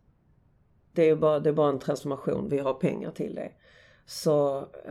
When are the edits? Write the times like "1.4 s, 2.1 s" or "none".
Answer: none